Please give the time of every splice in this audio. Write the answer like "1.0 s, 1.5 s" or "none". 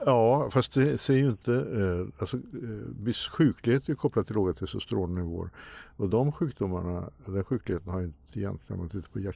6.1 s, 8.3 s